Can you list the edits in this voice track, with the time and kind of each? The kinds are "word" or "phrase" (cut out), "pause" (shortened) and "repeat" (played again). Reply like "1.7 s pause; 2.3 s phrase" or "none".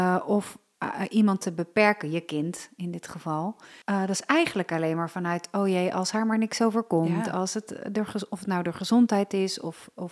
3.8 s pause